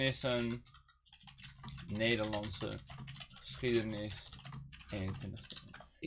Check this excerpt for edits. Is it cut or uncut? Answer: uncut